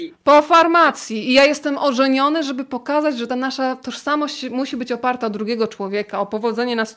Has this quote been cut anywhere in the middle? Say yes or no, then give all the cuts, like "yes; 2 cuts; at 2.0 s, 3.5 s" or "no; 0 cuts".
no; 0 cuts